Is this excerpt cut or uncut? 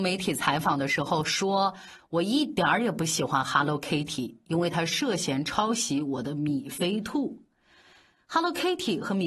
uncut